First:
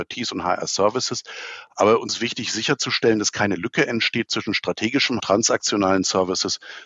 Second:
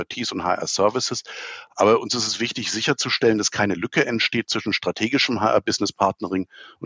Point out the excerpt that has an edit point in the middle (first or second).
first